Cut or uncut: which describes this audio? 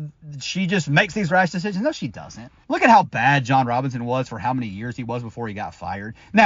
cut